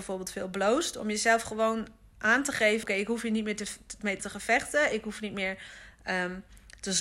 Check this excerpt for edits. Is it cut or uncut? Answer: cut